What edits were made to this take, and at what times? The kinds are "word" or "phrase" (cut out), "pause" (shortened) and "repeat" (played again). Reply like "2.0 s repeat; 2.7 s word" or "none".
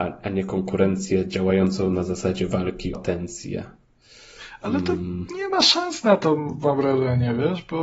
2.9 s word